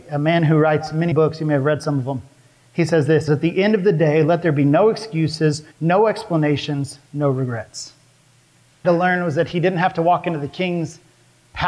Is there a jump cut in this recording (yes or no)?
yes